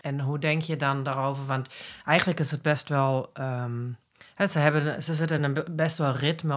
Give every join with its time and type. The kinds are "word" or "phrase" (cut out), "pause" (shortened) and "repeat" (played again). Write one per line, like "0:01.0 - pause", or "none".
none